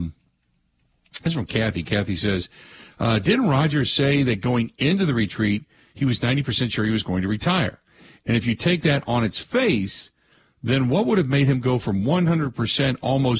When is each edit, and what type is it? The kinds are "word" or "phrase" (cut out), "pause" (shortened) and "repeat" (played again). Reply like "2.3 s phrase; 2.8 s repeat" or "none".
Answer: none